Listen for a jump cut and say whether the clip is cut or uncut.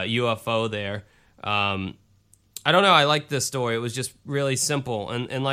uncut